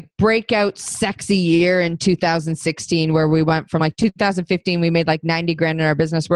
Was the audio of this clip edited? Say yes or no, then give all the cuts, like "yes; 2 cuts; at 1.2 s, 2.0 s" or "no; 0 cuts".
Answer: no; 0 cuts